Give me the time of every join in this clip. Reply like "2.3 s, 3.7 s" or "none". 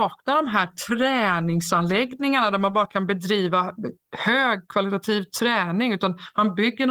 none

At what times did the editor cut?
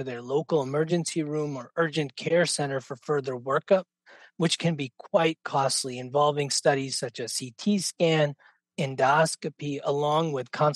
none

